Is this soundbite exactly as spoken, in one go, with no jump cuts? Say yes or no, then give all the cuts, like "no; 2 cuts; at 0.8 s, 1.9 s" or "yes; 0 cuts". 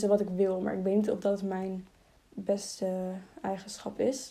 yes; 0 cuts